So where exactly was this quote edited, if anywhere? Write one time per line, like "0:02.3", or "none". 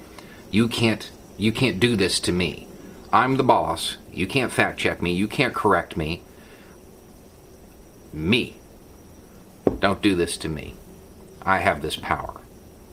none